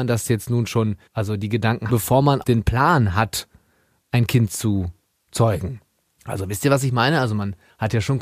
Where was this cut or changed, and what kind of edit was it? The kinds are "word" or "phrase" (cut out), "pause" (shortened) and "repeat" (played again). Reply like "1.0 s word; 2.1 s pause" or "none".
1.1 s pause; 1.9 s phrase; 2.4 s word; 6.0 s pause